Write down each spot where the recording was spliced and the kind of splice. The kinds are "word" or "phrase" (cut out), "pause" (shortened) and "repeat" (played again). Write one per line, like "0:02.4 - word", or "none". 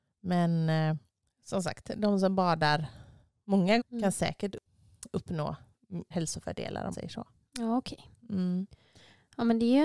0:03.8 - word
0:06.1 - word
0:06.9 - word